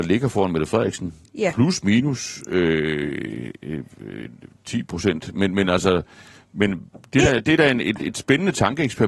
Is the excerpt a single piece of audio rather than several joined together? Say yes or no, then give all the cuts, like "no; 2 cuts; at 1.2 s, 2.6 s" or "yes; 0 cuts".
yes; 0 cuts